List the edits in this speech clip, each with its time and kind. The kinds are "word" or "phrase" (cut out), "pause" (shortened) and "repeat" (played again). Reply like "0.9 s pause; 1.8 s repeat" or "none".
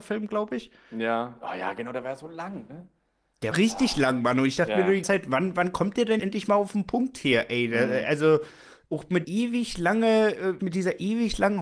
3.5 s word; 5.0 s word; 6.2 s word; 9.2 s word; 10.6 s word